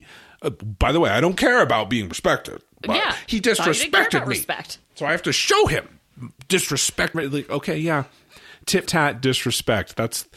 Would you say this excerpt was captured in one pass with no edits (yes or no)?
no